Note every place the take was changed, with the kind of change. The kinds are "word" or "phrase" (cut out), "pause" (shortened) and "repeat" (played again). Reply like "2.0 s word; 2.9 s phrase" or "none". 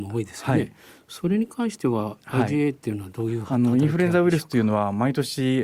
none